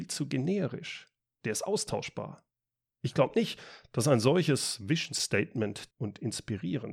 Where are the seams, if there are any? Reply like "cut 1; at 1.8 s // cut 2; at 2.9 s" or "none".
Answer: cut 1; at 5.9 s